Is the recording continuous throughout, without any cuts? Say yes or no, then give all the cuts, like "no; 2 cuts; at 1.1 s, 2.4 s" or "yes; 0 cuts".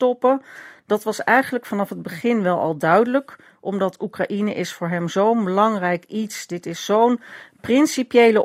yes; 0 cuts